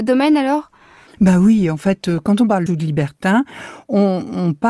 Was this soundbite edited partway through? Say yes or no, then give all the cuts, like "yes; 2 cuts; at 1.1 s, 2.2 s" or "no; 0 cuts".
yes; 1 cut; at 2.7 s